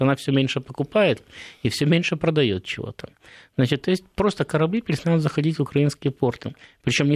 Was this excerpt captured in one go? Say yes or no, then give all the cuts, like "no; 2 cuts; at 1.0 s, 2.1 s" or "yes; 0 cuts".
yes; 0 cuts